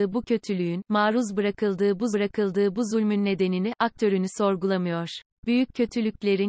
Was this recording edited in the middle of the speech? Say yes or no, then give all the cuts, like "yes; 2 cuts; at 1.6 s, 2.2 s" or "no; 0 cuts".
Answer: yes; 2 cuts; at 2.1 s, 5.3 s